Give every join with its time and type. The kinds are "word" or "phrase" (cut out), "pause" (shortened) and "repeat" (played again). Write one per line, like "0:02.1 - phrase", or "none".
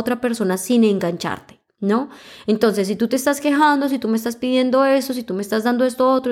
none